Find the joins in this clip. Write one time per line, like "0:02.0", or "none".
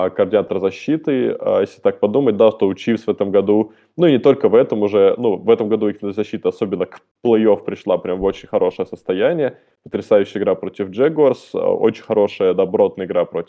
none